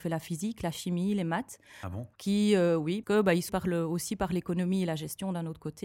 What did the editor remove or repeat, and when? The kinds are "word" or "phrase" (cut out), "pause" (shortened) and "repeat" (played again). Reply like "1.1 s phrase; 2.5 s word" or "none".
2.1 s pause; 3.0 s word; 3.5 s word

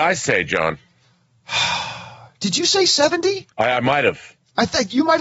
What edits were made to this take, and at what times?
3.5 s pause

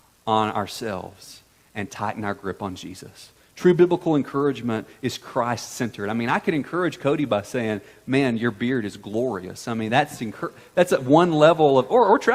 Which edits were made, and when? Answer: none

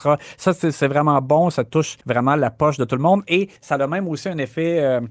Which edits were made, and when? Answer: 2.0 s pause; 3.6 s pause

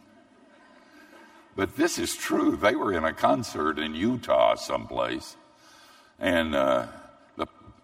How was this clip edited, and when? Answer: none

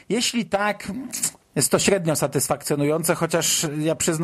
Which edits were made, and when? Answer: 1.4 s pause

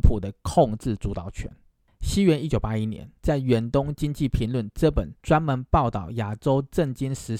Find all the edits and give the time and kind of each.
1.8 s pause; 3.2 s pause; 5.2 s pause

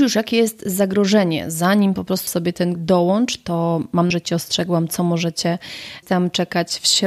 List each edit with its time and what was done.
2.3 s word; 2.8 s word; 4.1 s word; 6.0 s word

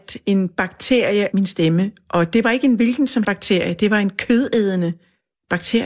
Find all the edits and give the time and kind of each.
1.3 s word; 3.2 s word

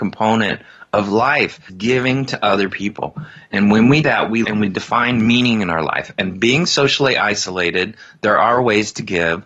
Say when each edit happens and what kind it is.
1.7 s word; 4.0 s word; 4.4 s phrase

